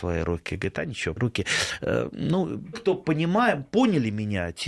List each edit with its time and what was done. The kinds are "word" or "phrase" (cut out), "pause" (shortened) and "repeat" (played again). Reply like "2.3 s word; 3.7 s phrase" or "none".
1.2 s phrase; 2.7 s word